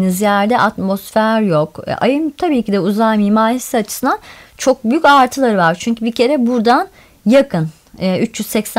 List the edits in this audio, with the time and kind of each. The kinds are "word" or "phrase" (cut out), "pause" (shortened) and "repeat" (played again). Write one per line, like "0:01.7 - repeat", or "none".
none

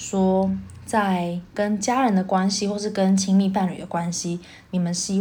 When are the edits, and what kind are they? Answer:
0:01.5 - pause

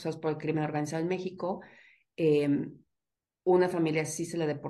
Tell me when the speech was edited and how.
none

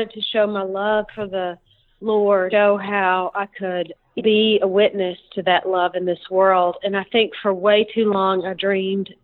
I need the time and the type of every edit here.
0:02.5 - word
0:04.2 - word

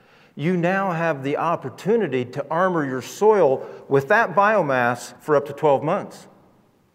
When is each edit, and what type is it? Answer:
0:05.2 - pause

